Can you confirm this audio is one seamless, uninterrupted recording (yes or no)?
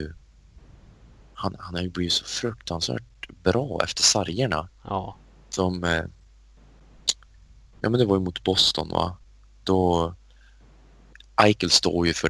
yes